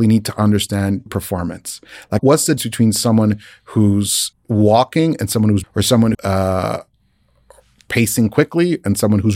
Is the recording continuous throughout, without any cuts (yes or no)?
no